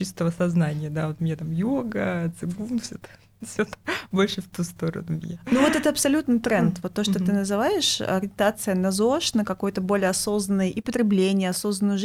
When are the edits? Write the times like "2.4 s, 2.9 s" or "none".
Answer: none